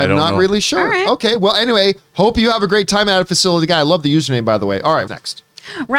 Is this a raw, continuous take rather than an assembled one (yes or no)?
no